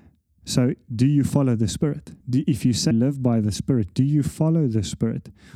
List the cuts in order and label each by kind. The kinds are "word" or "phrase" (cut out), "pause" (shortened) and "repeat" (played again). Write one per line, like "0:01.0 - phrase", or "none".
0:02.2 - pause
0:02.9 - word